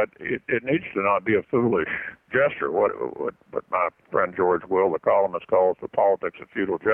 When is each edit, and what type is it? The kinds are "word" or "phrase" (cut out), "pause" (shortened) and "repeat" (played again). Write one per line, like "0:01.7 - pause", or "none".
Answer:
0:02.3 - word